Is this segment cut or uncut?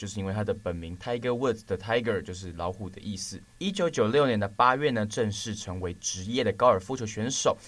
cut